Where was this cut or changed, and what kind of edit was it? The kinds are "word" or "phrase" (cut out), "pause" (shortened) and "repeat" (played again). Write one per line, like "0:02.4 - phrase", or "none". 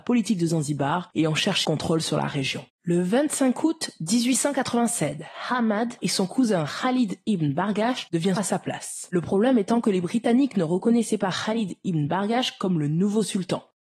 0:01.6 - phrase
0:02.7 - pause
0:06.0 - word
0:08.4 - word